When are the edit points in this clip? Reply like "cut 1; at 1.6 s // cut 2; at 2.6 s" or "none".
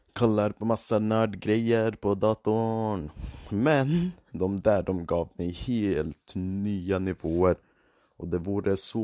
none